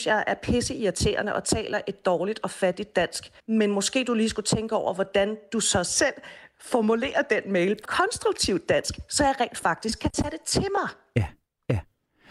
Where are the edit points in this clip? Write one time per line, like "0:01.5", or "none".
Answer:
0:03.4
0:07.9